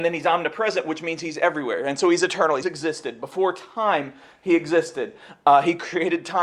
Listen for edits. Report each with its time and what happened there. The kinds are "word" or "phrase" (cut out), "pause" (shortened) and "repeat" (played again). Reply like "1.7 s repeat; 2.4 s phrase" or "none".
2.6 s word